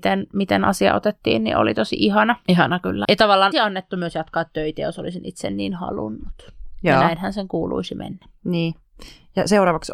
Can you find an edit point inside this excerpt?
yes; 2 cuts; at 3.0 s, 3.5 s

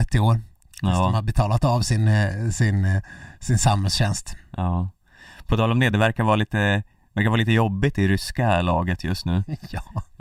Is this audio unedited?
yes; 0 cuts

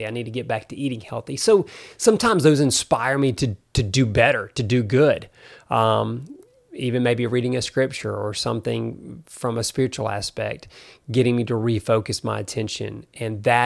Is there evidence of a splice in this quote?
no; 0 cuts

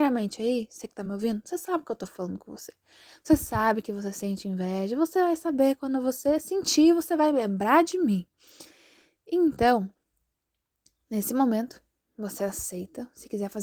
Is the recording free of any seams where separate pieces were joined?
yes; 0 cuts

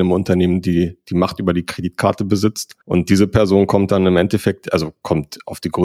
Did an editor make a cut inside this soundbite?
yes; 1 cut; at 2.8 s

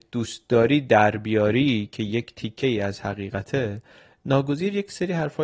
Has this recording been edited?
no; 0 cuts

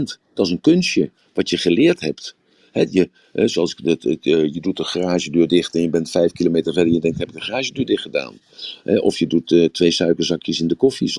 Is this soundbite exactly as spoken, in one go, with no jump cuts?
yes; 0 cuts

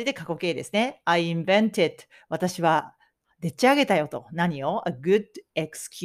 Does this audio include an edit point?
no; 0 cuts

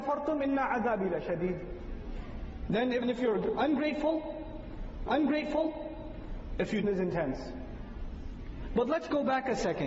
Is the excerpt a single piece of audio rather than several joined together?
no; 3 cuts; at 3.0 s, 5.1 s, 6.8 s

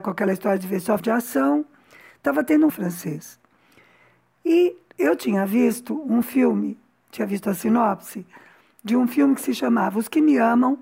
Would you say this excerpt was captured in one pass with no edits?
no; 2 cuts; at 1.0 s, 2.7 s

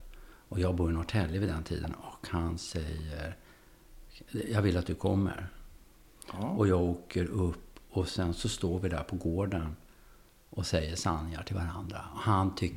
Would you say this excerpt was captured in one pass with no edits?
yes; 0 cuts

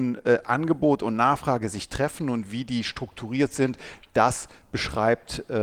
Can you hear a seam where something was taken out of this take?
no; 0 cuts

